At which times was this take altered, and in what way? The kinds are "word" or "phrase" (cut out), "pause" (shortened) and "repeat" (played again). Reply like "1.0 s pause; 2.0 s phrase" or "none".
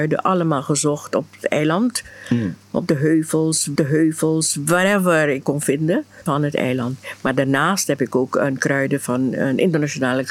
3.8 s repeat; 5.4 s word; 6.3 s word

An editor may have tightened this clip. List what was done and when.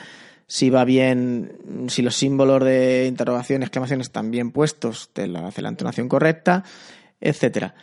none

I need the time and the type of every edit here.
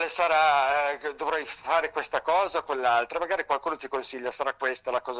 none

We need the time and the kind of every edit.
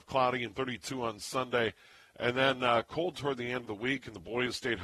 none

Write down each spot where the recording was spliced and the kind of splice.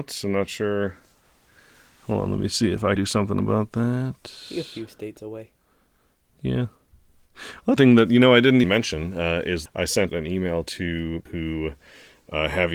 3.0 s word; 7.8 s word; 8.6 s word; 9.7 s word; 10.1 s word; 11.3 s word

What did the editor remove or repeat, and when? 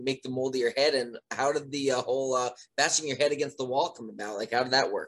none

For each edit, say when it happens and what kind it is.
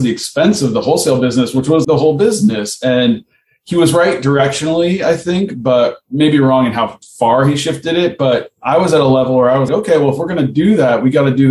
1.8 s word; 9.7 s word

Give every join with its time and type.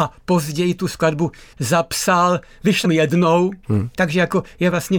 1.5 s word; 2.8 s word; 3.6 s pause

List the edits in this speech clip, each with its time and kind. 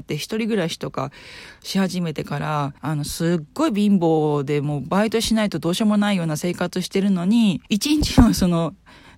2.8 s pause; 7.7 s pause

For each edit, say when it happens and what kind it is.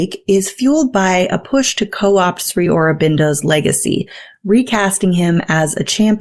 none

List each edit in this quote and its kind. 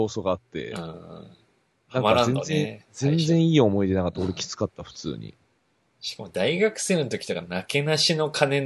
none

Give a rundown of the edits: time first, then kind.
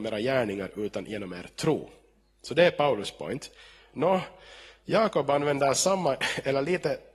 none

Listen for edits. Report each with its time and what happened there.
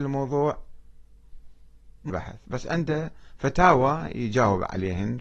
2.1 s word

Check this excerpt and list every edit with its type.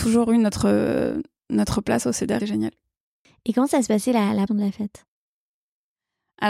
2.4 s phrase; 4.5 s word

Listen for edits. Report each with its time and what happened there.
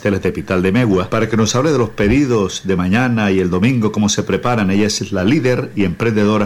none

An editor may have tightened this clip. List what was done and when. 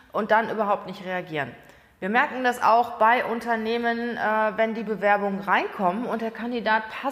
none

